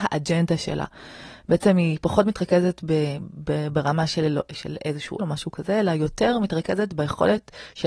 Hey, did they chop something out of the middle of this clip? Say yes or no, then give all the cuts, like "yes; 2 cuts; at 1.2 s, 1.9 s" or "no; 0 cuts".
yes; 1 cut; at 5.2 s